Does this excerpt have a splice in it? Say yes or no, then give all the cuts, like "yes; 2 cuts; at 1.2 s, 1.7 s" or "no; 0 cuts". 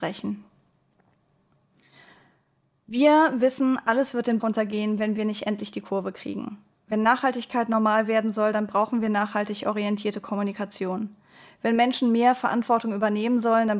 yes; 1 cut; at 4.4 s